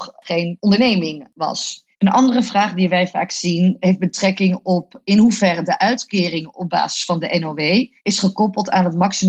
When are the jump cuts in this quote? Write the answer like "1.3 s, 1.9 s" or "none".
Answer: 1.9 s, 8.0 s